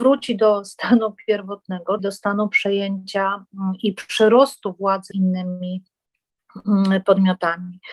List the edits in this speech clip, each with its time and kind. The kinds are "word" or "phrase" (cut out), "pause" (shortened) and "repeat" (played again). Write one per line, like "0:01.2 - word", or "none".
0:02.0 - word
0:05.1 - word